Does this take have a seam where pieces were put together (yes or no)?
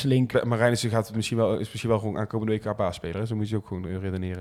no